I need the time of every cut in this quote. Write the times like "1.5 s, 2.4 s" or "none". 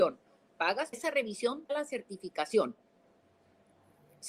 0.9 s, 1.7 s